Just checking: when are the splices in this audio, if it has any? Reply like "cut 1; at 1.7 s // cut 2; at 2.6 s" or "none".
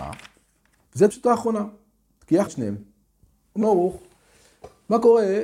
cut 1; at 1.1 s // cut 2; at 2.5 s // cut 3; at 3.6 s